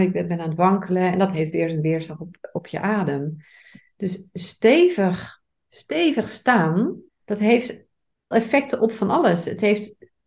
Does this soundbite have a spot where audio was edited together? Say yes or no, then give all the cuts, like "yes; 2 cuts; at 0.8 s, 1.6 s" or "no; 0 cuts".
yes; 2 cuts; at 7.1 s, 8.3 s